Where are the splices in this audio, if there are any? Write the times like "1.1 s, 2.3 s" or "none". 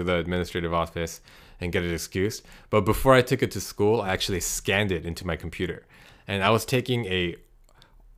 none